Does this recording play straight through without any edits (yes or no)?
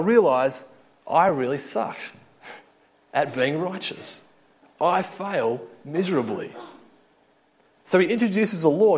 yes